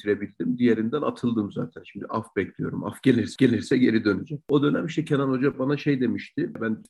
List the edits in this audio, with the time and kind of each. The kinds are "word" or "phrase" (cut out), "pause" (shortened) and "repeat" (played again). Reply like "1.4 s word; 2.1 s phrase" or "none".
3.4 s repeat